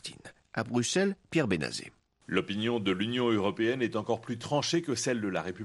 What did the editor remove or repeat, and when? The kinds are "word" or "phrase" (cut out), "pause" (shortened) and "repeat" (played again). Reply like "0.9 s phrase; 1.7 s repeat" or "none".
none